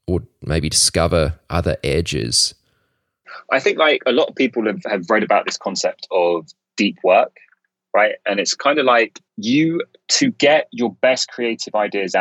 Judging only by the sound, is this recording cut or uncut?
cut